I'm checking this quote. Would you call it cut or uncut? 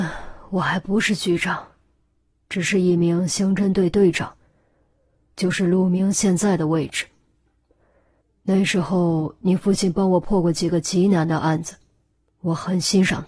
uncut